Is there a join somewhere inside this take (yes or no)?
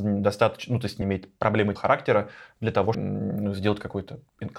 yes